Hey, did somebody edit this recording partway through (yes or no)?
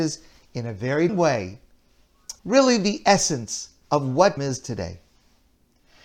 yes